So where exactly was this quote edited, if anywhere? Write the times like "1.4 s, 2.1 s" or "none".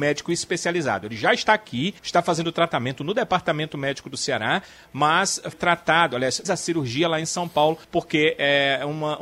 2.0 s, 5.5 s, 6.4 s, 7.8 s